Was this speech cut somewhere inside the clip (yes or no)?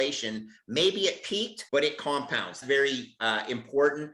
yes